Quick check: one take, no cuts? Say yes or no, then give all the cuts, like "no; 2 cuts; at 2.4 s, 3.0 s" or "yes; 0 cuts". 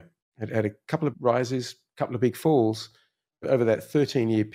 no; 2 cuts; at 1.1 s, 3.4 s